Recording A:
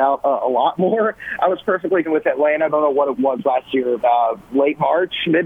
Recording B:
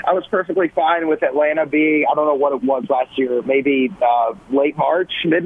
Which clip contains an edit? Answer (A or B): A